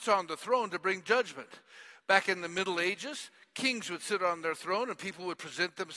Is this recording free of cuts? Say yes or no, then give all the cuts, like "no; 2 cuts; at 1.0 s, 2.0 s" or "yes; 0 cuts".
yes; 0 cuts